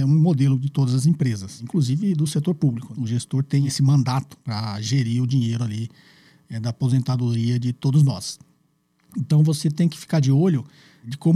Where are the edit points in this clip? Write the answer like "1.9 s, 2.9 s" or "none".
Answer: none